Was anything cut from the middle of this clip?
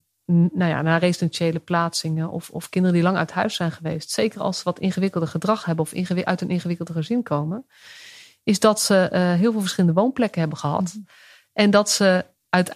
no; 0 cuts

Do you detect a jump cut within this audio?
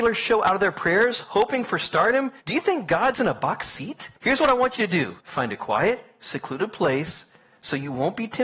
yes; 4 cuts; at 2.4 s, 3.1 s, 4.2 s, 5.2 s

